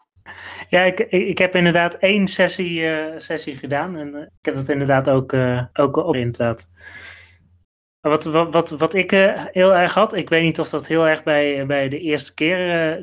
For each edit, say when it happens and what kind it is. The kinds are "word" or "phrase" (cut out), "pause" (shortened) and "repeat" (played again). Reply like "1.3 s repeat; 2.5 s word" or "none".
4.3 s word; 5.7 s pause; 6.1 s phrase